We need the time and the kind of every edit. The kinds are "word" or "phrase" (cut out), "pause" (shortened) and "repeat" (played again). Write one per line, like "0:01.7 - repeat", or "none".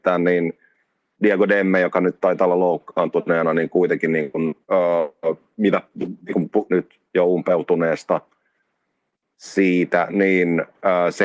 0:04.6 - pause
0:06.7 - phrase